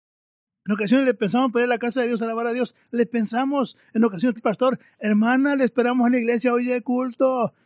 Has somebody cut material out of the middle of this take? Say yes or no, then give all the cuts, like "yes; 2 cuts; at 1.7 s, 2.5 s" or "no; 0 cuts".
yes; 1 cut; at 4.4 s